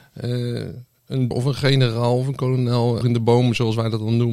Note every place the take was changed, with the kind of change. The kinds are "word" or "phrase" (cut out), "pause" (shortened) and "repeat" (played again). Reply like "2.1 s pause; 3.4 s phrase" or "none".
1.3 s word; 3.0 s word

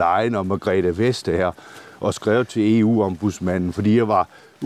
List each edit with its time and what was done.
none

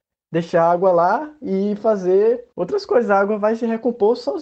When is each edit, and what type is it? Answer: 2.5 s pause

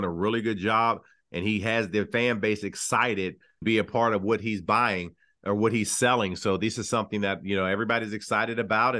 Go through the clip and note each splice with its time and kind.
3.6 s word

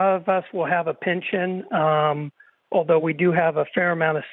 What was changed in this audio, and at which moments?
none

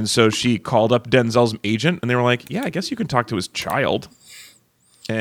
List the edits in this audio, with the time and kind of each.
none

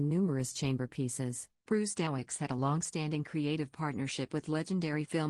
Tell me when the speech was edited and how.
1.6 s pause

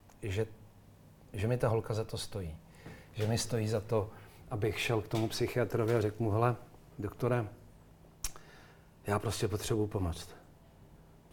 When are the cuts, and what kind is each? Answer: none

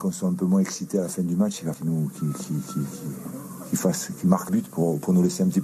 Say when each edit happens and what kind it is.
1.7 s word; 4.5 s word

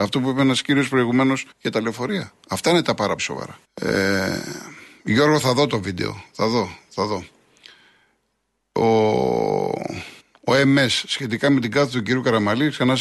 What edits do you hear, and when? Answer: 1.5 s pause; 3.2 s word; 3.6 s pause; 10.2 s pause

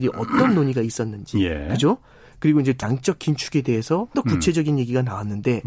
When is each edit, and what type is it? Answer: 2.8 s word; 4.1 s word

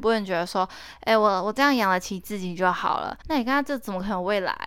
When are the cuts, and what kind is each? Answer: 3.2 s pause

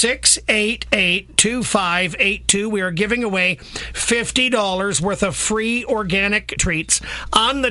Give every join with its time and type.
6.6 s word

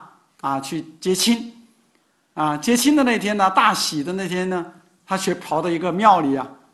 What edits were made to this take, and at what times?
none

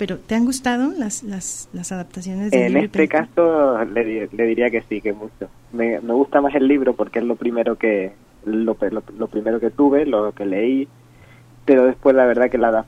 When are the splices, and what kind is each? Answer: none

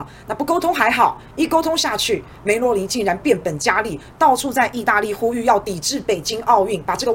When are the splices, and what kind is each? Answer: 4.1 s phrase

